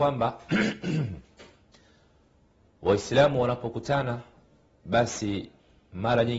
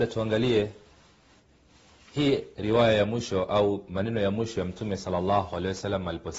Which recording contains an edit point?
first; 1 cut; at 1.2 s

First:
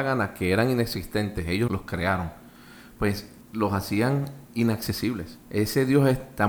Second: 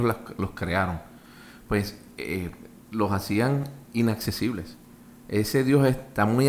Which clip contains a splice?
first; 3 cuts; at 1.7 s, 3.4 s, 5.4 s

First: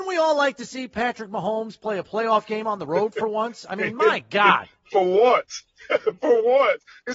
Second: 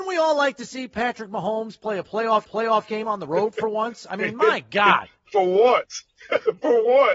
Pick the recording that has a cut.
second; 1 cut; at 2.4 s

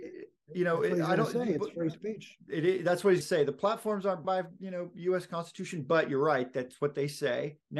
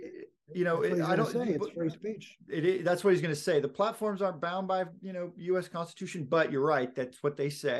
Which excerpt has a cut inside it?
first; 2 cuts; at 3.2 s, 4.2 s

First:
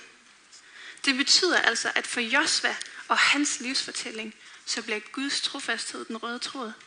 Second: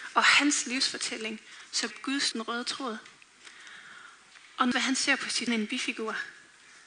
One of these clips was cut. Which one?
second; 4 cuts; at 1.9 s, 2.3 s, 4.7 s, 5.5 s

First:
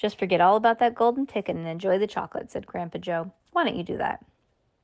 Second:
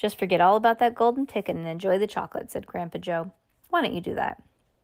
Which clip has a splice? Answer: first; 1 cut; at 3.4 s

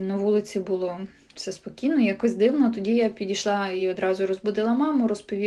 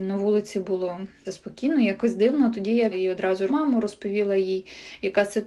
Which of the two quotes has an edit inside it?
second; 3 cuts; at 1.2 s, 2.9 s, 3.5 s

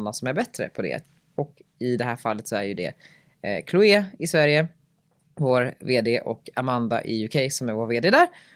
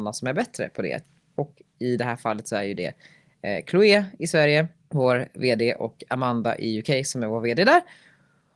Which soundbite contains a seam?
second; 1 cut; at 4.8 s

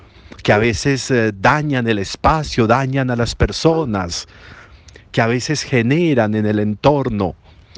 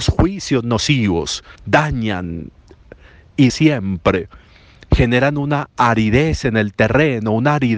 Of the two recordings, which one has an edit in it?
second; 2 cuts; at 1.6 s, 3.5 s

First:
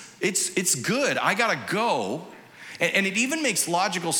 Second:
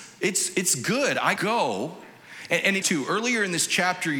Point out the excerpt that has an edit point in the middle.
second; 2 cuts; at 1.4 s, 2.8 s

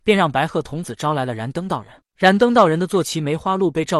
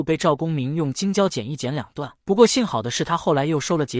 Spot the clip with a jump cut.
second; 1 cut; at 2.2 s

